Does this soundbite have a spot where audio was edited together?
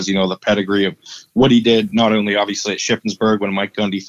no; 0 cuts

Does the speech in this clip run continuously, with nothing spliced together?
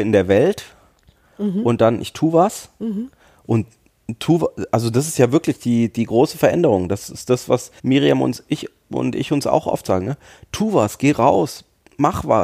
no; 1 cut; at 7.8 s

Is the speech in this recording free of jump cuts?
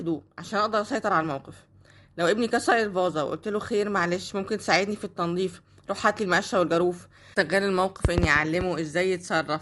yes; 0 cuts

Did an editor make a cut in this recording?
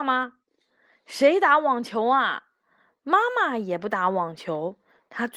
no; 0 cuts

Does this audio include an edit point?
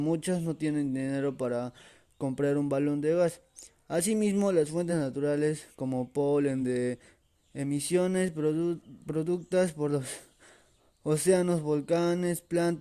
no; 0 cuts

